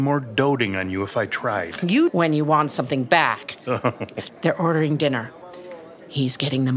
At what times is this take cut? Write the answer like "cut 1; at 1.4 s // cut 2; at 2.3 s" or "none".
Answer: cut 1; at 2.1 s // cut 2; at 4.3 s

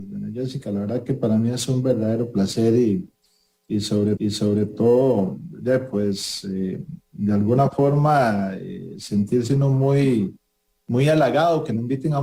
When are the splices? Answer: cut 1; at 4.2 s

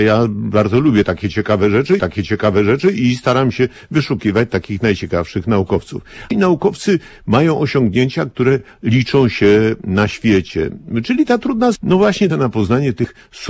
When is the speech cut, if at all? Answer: cut 1; at 2.0 s // cut 2; at 6.3 s // cut 3; at 11.7 s // cut 4; at 12.3 s

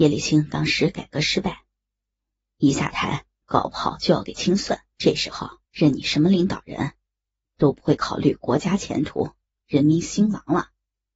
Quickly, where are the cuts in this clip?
cut 1; at 4.9 s // cut 2; at 5.7 s

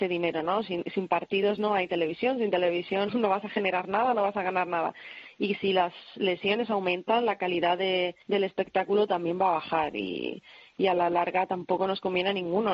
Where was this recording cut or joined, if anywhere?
cut 1; at 3.1 s // cut 2; at 8.2 s

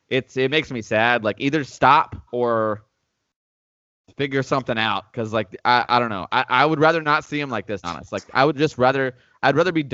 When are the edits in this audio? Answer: cut 1; at 2.3 s // cut 2; at 7.8 s

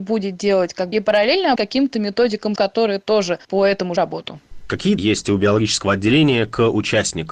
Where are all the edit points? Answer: cut 1; at 0.9 s // cut 2; at 1.6 s // cut 3; at 2.6 s // cut 4; at 3.4 s // cut 5; at 4.0 s // cut 6; at 5.0 s

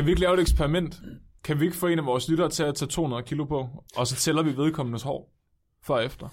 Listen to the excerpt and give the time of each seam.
cut 1; at 3.9 s

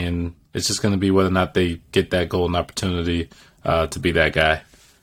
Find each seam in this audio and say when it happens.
none

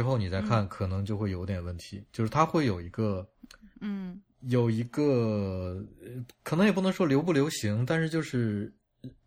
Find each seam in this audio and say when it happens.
cut 1; at 3.7 s

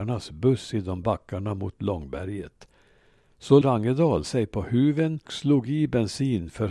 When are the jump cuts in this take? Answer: cut 1; at 1.0 s // cut 2; at 3.6 s // cut 3; at 4.2 s // cut 4; at 5.3 s

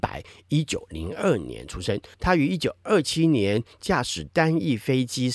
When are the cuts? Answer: cut 1; at 2.1 s

